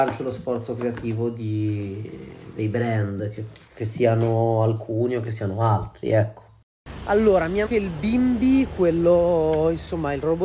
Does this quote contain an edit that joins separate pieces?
yes; 2 cuts; at 3.7 s, 7.7 s

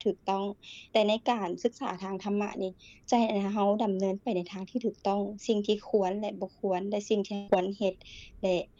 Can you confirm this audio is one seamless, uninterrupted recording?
yes; 0 cuts

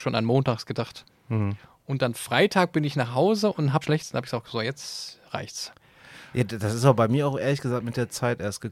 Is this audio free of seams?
no; 1 cut; at 3.8 s

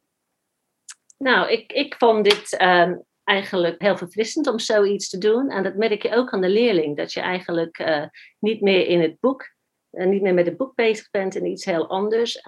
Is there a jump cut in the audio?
yes; 1 cut; at 3.8 s

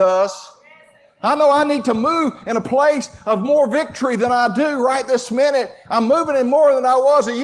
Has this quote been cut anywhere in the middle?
no; 0 cuts

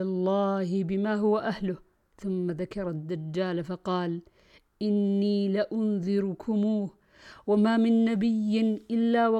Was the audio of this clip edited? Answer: no; 0 cuts

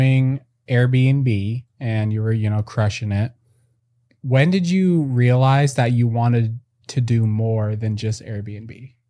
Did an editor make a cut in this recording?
no; 0 cuts

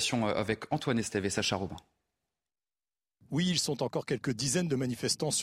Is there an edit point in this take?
no; 0 cuts

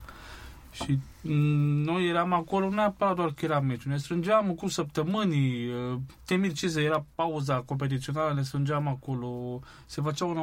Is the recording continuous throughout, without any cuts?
yes; 0 cuts

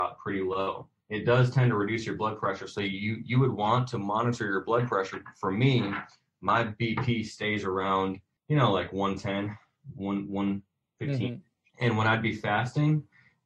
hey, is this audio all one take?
yes; 0 cuts

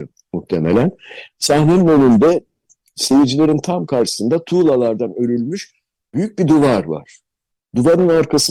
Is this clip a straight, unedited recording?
yes; 0 cuts

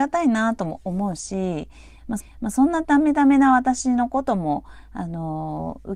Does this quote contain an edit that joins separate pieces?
yes; 1 cut; at 2.2 s

